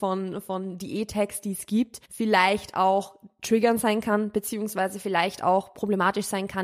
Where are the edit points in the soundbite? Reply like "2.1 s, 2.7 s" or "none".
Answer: 2.0 s